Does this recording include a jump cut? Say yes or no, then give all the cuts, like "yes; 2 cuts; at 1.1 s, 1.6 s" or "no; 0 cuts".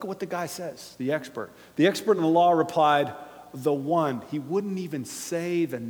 no; 0 cuts